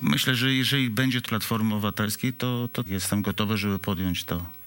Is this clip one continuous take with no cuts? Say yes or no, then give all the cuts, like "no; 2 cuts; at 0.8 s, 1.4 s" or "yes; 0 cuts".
no; 2 cuts; at 1.3 s, 2.9 s